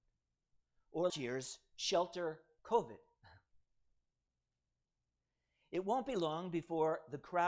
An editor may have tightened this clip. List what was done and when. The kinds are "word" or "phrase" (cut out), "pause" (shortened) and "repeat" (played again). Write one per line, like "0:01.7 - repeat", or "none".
0:01.1 - word
0:02.6 - word